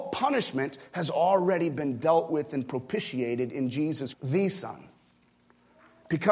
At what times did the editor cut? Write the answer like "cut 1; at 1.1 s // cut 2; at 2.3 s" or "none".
cut 1; at 4.1 s